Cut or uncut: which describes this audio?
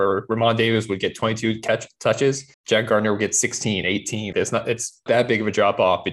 cut